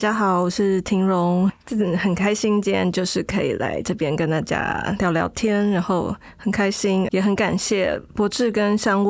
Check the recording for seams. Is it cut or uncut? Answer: cut